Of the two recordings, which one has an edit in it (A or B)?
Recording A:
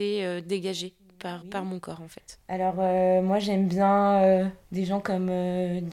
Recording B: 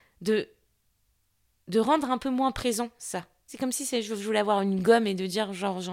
A